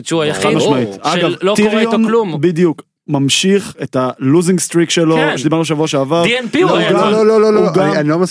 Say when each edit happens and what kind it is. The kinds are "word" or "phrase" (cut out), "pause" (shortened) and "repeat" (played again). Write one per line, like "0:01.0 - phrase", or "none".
none